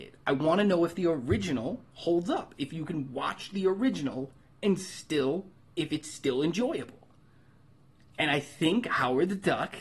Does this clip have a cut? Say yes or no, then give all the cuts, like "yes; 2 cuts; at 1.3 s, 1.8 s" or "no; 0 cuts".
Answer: yes; 1 cut; at 5.6 s